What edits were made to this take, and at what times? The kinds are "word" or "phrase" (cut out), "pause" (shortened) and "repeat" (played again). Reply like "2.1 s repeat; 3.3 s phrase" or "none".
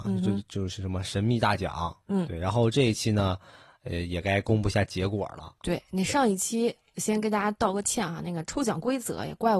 none